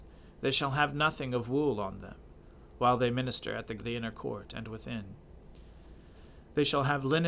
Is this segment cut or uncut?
cut